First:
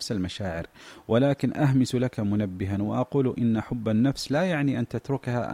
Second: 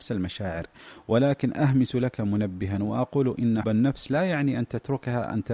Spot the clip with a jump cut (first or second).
second